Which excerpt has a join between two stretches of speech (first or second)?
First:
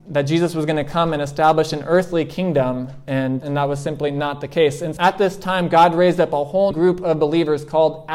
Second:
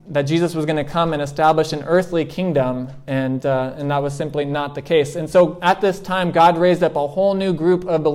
first